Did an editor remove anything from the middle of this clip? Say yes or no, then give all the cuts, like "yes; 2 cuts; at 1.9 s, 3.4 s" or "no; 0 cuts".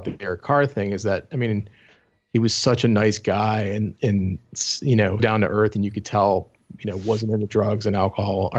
yes; 2 cuts; at 4.0 s, 5.2 s